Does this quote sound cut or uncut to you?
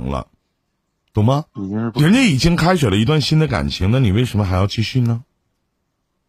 cut